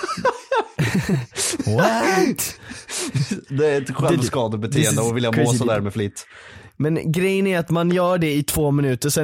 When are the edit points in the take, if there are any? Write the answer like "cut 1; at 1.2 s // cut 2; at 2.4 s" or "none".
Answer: none